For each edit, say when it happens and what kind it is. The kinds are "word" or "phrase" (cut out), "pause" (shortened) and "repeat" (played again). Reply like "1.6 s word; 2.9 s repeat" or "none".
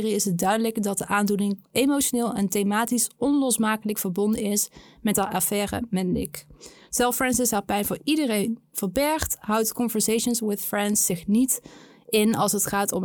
none